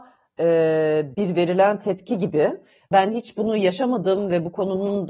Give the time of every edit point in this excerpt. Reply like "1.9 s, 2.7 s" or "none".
1.1 s, 2.9 s